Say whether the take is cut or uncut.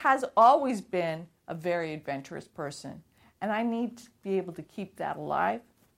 uncut